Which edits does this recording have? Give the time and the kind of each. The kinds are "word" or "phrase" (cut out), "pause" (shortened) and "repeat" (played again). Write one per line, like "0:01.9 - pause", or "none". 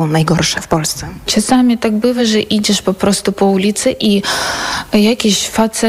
none